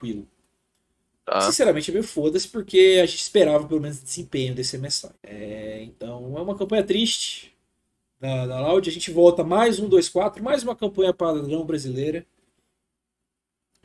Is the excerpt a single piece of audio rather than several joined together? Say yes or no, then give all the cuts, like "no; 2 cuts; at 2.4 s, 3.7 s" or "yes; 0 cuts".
no; 1 cut; at 5.1 s